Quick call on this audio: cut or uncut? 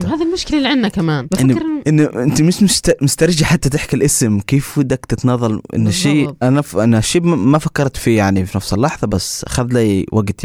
cut